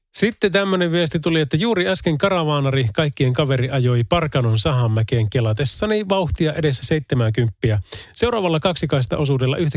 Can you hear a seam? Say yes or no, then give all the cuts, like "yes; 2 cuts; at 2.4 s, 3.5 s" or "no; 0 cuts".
no; 0 cuts